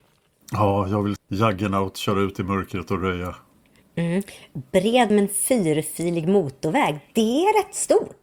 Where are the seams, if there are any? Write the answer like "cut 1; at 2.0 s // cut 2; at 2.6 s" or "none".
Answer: cut 1; at 1.2 s // cut 2; at 5.1 s